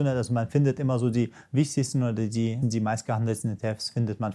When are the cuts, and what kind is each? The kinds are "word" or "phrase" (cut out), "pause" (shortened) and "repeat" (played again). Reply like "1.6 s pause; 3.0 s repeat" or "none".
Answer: 2.6 s word